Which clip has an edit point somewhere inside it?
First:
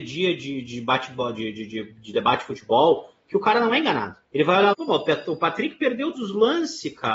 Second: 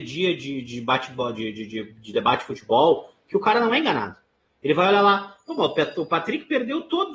first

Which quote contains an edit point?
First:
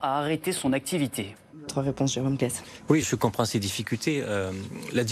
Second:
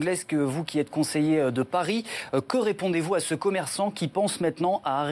first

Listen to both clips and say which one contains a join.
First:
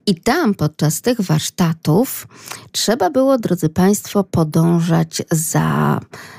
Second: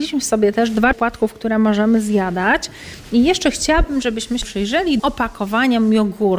second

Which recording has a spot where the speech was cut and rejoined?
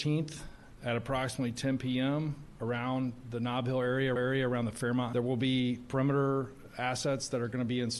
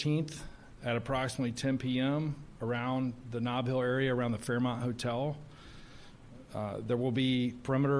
first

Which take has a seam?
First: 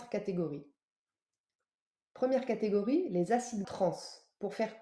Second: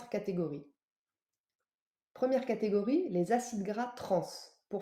first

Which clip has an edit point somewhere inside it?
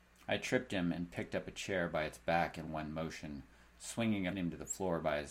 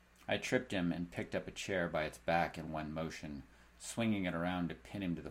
first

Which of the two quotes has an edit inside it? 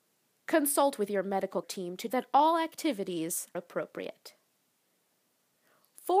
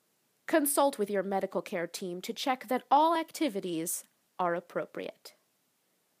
first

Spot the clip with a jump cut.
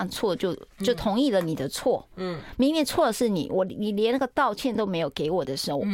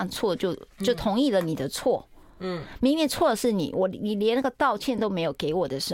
first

